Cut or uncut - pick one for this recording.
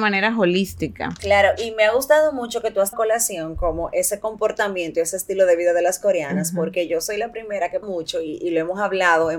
cut